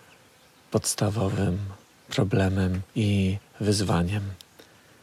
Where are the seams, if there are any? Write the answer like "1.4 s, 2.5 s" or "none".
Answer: 2.9 s